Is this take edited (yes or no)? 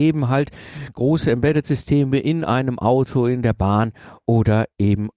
no